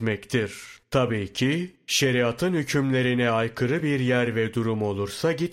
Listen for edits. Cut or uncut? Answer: uncut